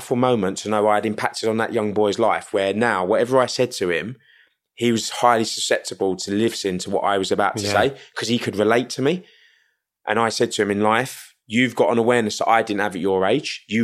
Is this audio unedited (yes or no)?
yes